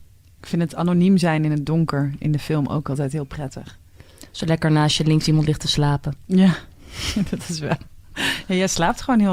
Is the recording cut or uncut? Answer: uncut